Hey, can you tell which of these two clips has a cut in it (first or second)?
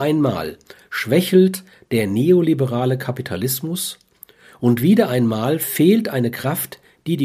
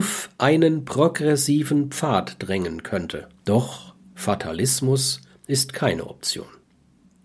second